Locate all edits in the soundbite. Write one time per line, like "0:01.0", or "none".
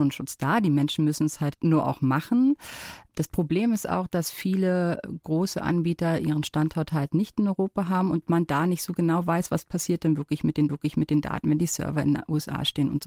0:10.7